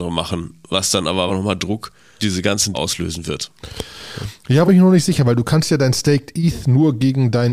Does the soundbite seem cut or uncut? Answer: cut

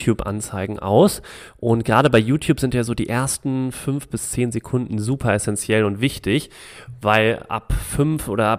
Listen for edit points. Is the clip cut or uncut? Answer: uncut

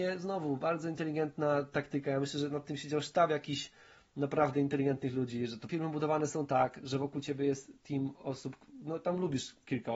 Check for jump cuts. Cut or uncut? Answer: cut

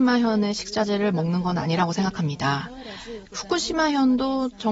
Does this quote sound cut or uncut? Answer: uncut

